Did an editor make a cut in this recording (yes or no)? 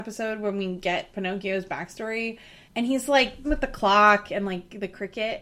yes